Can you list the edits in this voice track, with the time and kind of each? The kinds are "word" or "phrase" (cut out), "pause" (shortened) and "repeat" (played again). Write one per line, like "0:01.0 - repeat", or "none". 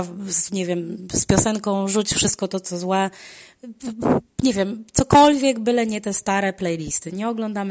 0:04.3 - pause